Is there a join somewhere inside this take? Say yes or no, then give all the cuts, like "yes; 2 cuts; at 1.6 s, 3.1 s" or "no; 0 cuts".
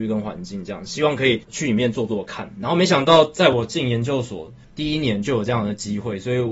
yes; 2 cuts; at 1.4 s, 4.6 s